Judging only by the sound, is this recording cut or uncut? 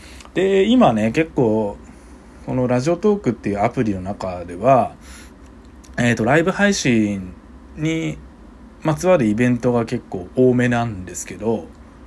uncut